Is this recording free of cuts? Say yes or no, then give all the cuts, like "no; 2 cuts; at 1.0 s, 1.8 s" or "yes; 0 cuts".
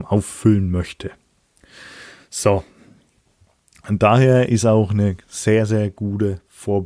yes; 0 cuts